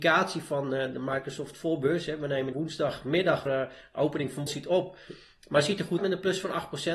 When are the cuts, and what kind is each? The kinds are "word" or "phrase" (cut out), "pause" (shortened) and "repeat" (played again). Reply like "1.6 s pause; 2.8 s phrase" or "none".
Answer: 2.5 s word; 3.5 s word; 4.5 s word; 6.0 s word